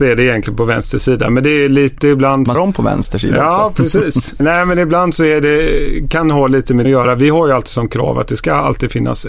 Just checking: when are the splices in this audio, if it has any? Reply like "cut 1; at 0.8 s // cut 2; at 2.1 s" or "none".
cut 1; at 2.5 s // cut 2; at 4.4 s // cut 3; at 6.8 s